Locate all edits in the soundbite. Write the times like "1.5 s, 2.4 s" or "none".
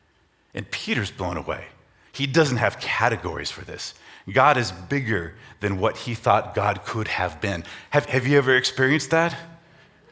none